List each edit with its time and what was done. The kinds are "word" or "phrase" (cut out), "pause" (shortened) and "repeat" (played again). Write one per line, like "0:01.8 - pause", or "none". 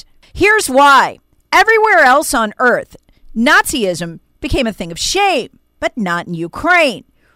none